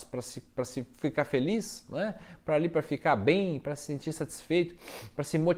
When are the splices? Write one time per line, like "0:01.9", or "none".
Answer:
0:00.9

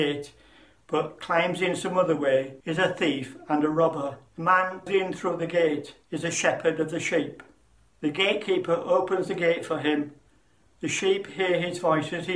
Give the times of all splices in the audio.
0:02.6
0:04.3
0:04.9
0:06.0
0:07.8

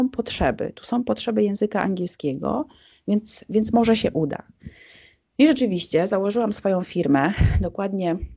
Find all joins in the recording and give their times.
none

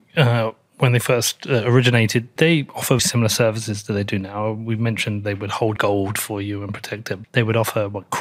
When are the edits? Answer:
0:02.4
0:03.0
0:05.8
0:07.2

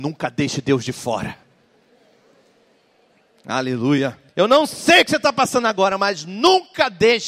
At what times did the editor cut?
0:04.3

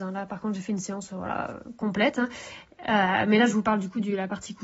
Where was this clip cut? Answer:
none

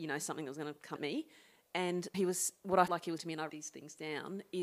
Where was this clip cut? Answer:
0:01.0
0:02.1
0:02.9
0:03.2
0:03.5

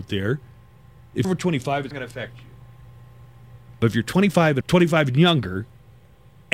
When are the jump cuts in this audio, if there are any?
0:01.2
0:01.9
0:04.6

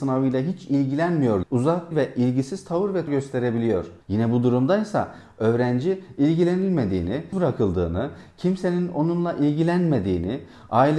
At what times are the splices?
0:01.4
0:01.9
0:03.1
0:04.0
0:07.3

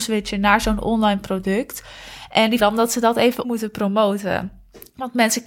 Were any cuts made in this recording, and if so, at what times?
0:02.6
0:03.4

